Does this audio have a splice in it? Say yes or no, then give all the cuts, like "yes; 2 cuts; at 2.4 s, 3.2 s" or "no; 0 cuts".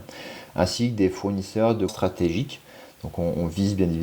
yes; 1 cut; at 1.9 s